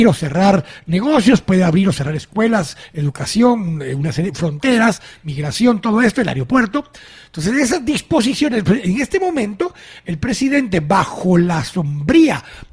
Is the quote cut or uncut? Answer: uncut